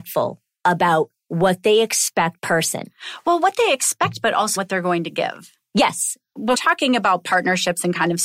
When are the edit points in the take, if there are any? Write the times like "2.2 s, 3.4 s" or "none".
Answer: 2.4 s, 4.6 s, 6.5 s